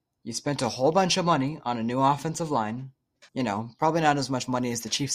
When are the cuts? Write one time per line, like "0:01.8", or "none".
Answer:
0:03.3